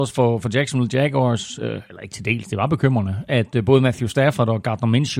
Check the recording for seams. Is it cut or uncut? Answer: uncut